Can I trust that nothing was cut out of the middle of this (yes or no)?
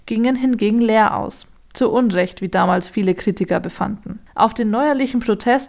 yes